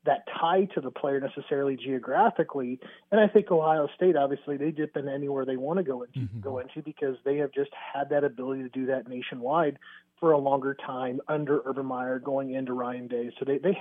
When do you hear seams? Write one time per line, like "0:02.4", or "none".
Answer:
none